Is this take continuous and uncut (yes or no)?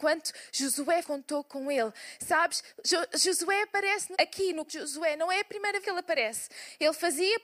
no